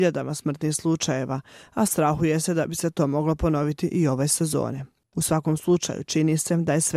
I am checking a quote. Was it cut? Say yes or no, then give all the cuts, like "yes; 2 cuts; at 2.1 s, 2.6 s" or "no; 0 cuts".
no; 0 cuts